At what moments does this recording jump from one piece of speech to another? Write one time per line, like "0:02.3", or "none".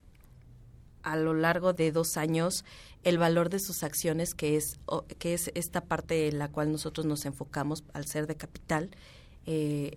0:01.8